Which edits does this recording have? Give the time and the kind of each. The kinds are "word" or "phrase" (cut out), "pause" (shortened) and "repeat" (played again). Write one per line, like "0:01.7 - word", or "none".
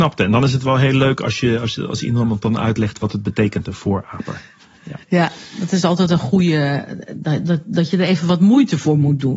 0:05.0 - pause